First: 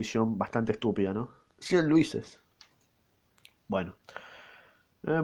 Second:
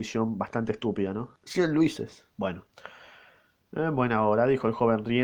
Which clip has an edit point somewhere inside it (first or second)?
second